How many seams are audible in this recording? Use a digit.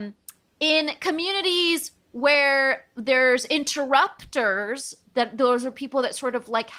0